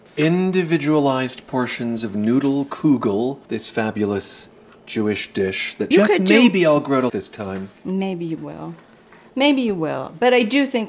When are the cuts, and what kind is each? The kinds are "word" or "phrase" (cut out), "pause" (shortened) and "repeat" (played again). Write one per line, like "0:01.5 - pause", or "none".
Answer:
0:03.5 - pause
0:05.9 - phrase
0:07.1 - word